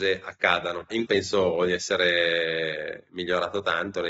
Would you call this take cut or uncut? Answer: cut